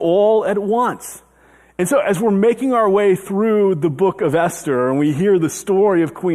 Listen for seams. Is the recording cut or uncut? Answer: uncut